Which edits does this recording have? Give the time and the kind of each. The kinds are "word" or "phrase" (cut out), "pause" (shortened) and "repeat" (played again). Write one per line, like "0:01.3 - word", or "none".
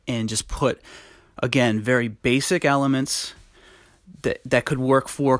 none